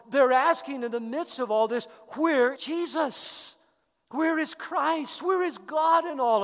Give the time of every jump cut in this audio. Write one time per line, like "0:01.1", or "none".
0:02.6